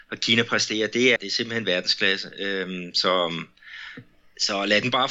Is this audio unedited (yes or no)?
no